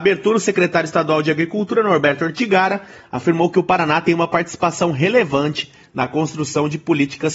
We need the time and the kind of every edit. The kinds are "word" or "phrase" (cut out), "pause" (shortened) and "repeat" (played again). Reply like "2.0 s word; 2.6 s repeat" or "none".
none

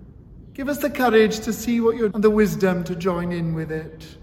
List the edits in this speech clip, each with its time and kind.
2.1 s word

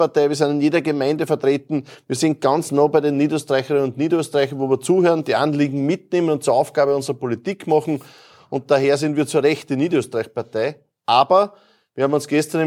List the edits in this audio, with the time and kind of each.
none

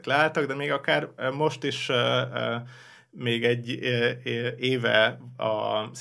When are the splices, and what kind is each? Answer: none

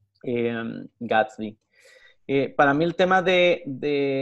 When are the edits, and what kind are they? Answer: none

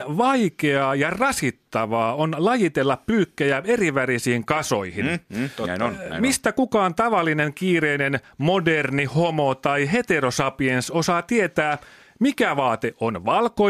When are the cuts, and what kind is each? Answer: none

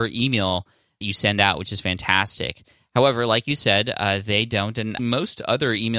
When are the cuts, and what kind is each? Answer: 1.0 s word; 5.0 s word

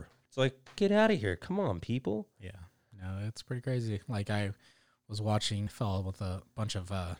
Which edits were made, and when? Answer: 5.7 s word

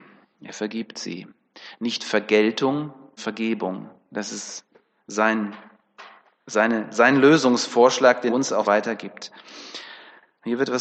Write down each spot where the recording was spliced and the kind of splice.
3.2 s word; 8.3 s word; 8.6 s word

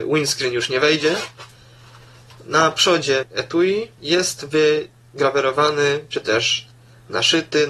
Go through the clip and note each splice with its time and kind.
none

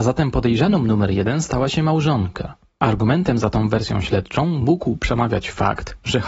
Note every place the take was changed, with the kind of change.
none

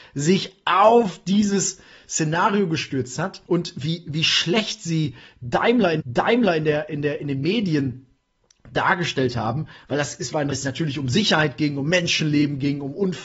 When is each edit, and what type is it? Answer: 3.5 s pause; 6.0 s repeat; 10.5 s phrase

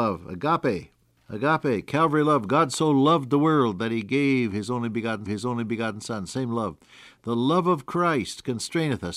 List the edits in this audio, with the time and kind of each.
1.2 s pause; 5.3 s repeat

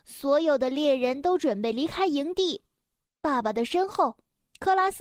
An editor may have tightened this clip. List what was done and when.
none

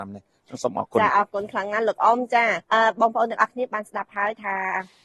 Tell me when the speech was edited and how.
2.6 s pause

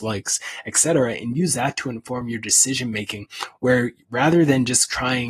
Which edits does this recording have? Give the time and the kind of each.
none

